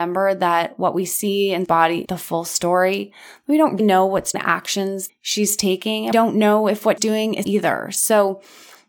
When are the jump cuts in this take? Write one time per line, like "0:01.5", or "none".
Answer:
0:01.7
0:02.1
0:03.8
0:04.3
0:05.1
0:06.1
0:07.0
0:07.4